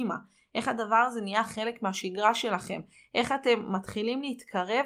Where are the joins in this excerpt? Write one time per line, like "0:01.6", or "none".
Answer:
none